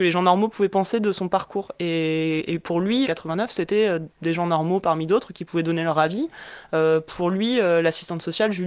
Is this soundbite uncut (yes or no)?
no